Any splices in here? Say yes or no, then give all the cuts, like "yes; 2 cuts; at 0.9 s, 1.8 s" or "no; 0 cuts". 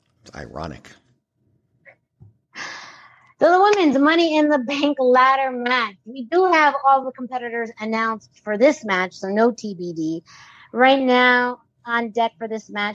no; 0 cuts